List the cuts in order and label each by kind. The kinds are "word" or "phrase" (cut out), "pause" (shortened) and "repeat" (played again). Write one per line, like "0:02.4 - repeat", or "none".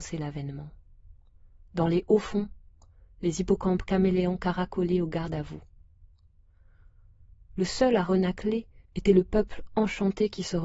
0:08.9 - pause